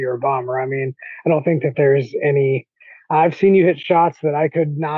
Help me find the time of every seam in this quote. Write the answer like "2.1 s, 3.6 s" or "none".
none